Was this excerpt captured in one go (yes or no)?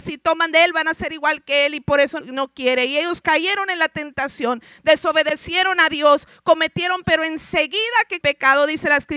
no